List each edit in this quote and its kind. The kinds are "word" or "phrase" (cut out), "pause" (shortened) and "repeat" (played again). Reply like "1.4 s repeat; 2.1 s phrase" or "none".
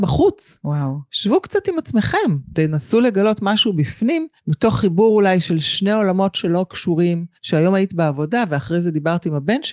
4.4 s pause; 7.4 s pause